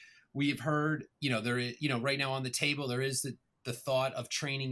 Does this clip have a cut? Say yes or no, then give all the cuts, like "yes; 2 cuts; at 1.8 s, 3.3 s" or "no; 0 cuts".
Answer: no; 0 cuts